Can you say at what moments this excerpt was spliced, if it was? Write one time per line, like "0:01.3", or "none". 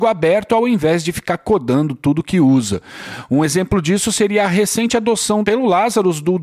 none

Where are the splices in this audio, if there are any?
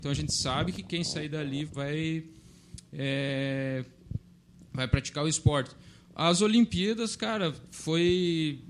0:01.7

